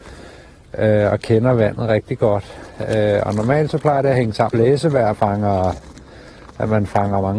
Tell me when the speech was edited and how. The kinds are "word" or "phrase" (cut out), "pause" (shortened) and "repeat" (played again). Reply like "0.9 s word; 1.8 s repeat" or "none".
4.5 s word; 5.1 s word